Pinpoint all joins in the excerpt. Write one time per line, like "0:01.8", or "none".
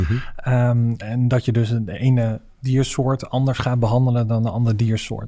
none